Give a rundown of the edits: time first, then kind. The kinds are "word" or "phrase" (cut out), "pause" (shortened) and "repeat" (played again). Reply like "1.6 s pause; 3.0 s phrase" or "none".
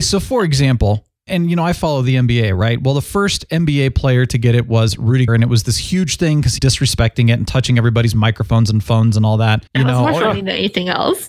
5.3 s word; 6.6 s word; 9.7 s pause